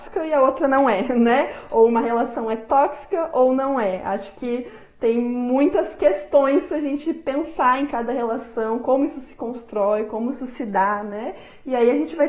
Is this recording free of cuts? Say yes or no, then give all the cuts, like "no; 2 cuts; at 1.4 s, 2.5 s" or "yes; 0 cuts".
yes; 0 cuts